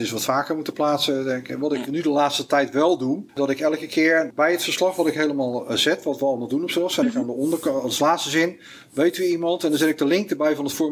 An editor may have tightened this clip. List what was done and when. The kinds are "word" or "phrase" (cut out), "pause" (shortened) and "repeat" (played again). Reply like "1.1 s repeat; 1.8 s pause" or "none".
3.3 s pause